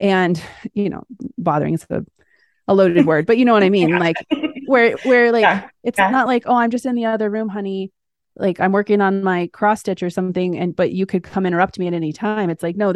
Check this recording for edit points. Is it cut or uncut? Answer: uncut